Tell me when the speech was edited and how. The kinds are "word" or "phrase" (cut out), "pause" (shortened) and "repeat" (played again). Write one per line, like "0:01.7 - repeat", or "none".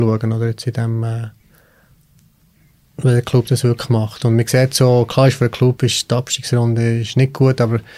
none